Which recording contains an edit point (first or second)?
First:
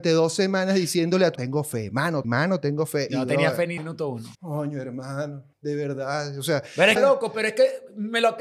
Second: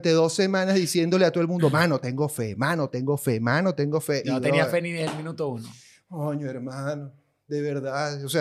first